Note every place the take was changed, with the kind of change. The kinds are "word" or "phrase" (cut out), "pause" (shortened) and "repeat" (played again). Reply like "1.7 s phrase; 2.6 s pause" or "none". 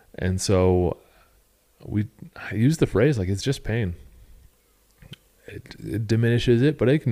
none